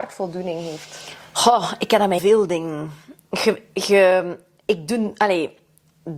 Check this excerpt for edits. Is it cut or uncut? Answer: cut